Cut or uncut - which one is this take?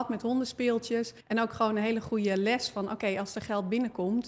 cut